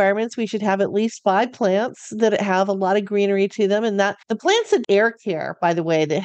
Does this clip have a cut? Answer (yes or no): yes